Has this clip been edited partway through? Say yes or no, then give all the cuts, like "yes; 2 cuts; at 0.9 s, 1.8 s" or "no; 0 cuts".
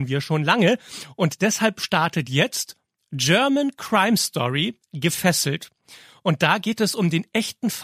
no; 0 cuts